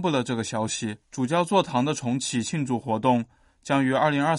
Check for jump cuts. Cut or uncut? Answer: cut